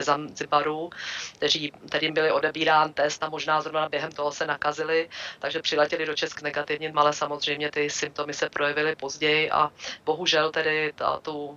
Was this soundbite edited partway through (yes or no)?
yes